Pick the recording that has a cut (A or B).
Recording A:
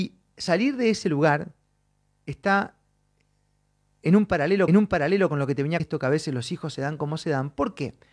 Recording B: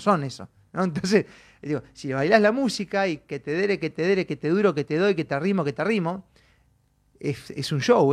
A